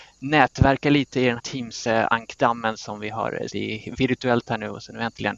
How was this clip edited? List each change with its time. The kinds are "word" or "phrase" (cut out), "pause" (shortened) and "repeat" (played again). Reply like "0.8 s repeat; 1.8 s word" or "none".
1.4 s word; 3.5 s word